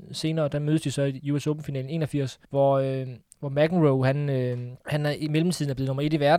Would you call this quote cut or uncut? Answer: cut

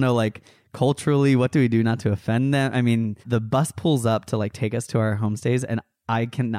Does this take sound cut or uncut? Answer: cut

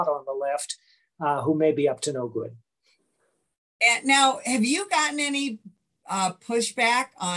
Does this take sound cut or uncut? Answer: uncut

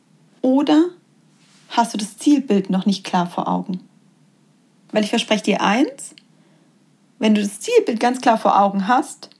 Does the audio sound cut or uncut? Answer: uncut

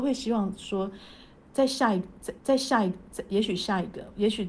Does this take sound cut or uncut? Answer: cut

